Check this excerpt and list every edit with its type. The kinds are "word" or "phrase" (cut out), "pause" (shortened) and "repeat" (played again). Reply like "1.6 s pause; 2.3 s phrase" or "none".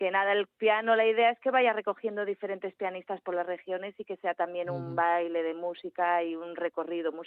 none